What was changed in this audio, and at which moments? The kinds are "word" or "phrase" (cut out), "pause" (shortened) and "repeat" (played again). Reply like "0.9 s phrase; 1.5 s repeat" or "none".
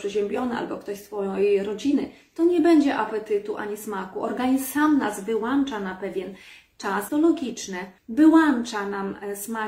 7.1 s word; 8.0 s pause